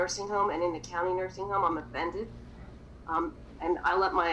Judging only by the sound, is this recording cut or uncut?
uncut